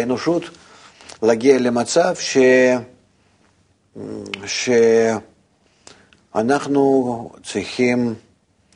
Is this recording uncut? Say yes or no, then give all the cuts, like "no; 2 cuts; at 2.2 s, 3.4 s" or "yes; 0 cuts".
yes; 0 cuts